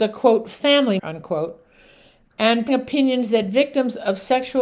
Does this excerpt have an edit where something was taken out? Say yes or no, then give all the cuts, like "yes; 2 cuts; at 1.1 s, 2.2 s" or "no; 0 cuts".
yes; 2 cuts; at 1.0 s, 2.7 s